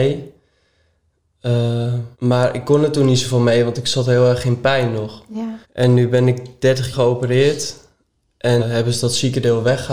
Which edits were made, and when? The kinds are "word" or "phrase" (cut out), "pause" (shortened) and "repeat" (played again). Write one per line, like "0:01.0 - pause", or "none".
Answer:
0:02.1 - pause
0:05.6 - pause
0:06.9 - word
0:08.6 - word

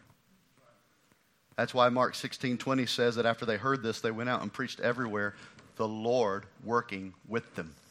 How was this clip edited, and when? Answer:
none

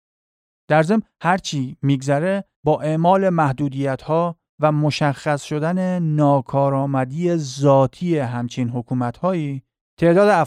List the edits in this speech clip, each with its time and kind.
none

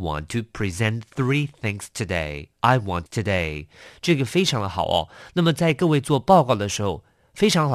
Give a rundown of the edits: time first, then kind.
0:02.5 - pause
0:03.1 - phrase

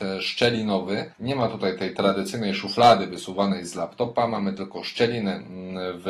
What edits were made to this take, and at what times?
none

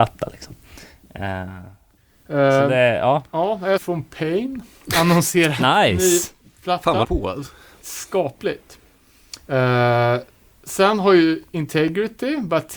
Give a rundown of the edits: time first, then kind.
0:03.8 - phrase
0:07.0 - phrase

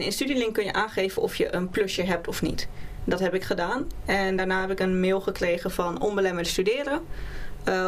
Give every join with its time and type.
none

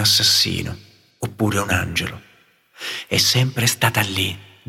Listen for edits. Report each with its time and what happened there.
none

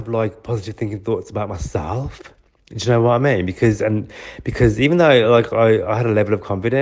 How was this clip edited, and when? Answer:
none

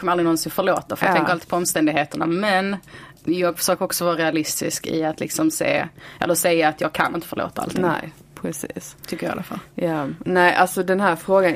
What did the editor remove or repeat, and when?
0:03.2 - pause
0:09.0 - pause

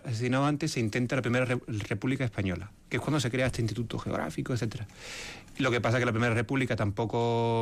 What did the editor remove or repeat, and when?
none

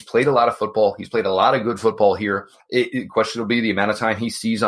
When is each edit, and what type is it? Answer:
0:02.6 - pause

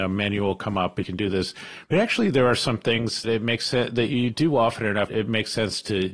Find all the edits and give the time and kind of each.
0:01.0 - word
0:03.2 - word
0:05.1 - word

